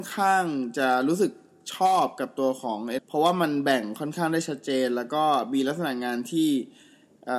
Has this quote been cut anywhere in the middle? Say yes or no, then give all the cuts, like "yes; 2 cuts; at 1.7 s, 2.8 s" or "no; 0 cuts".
yes; 1 cut; at 3.0 s